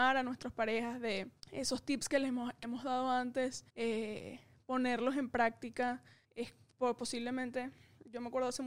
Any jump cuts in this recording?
yes; 4 cuts; at 1.4 s, 2.6 s, 3.7 s, 6.2 s

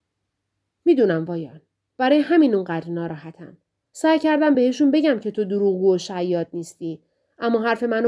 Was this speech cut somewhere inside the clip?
no; 0 cuts

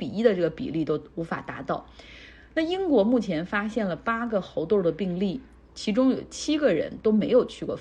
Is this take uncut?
yes; 0 cuts

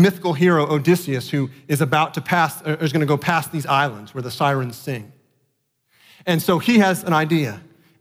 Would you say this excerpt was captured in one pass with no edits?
yes; 0 cuts

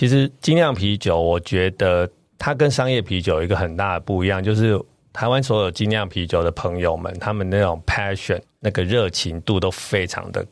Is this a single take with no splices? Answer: yes; 0 cuts

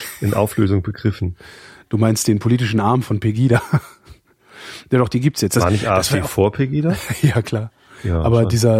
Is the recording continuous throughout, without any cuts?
yes; 0 cuts

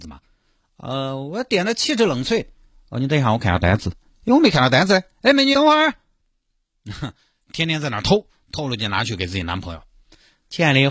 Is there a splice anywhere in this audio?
yes; 2 cuts; at 5.5 s, 7.5 s

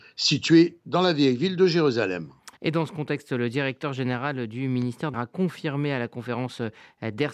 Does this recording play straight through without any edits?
no; 2 cuts; at 2.6 s, 5.1 s

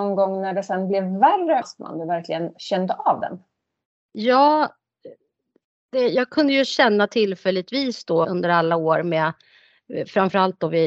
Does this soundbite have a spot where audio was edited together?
yes; 2 cuts; at 1.6 s, 8.2 s

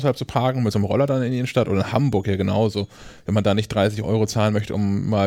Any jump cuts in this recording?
no; 0 cuts

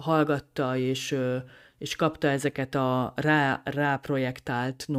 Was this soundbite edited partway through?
no; 0 cuts

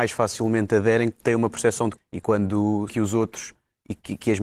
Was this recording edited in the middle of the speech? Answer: yes; 3 cuts; at 1.1 s, 2.0 s, 2.9 s

